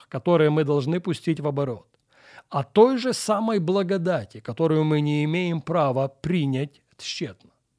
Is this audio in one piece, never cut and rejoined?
yes; 0 cuts

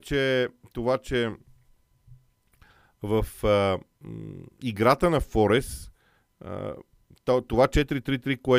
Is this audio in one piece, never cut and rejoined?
yes; 0 cuts

